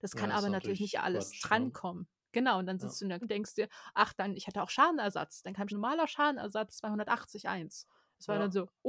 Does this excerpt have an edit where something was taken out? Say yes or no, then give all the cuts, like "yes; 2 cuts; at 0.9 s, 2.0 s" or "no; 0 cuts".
yes; 2 cuts; at 3.2 s, 5.7 s